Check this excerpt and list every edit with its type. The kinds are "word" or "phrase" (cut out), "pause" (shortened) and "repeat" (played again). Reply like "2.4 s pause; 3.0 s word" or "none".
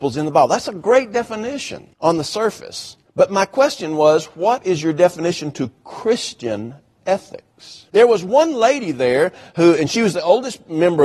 1.9 s pause; 3.1 s pause; 7.9 s pause